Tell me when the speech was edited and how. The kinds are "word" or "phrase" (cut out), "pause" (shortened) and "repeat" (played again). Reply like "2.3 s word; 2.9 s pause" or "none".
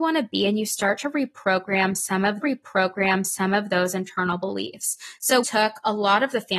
2.4 s repeat; 5.4 s word